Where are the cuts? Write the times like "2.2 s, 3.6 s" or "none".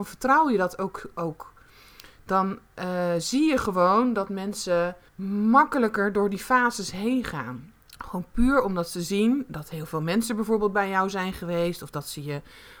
5.1 s, 7.8 s